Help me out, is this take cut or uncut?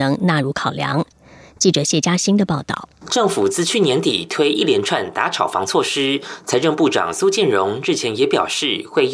uncut